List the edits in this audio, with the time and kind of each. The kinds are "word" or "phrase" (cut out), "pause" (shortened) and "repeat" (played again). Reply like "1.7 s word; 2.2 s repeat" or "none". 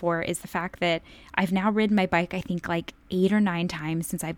none